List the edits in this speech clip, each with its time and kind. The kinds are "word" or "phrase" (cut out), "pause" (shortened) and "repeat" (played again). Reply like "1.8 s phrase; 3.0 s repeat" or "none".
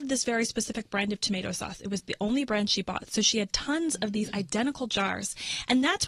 none

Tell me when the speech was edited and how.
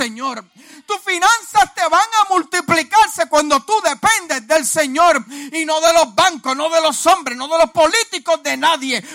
none

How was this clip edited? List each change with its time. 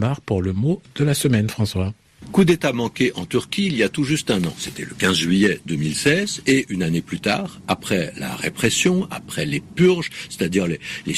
none

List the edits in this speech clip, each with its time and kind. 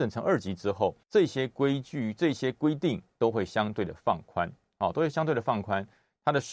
1.0 s pause

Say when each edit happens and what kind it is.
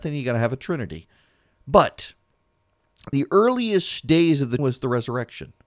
3.1 s word; 4.6 s phrase

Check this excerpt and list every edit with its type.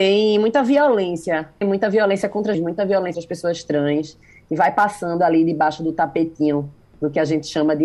1.6 s word; 2.5 s word; 3.1 s word

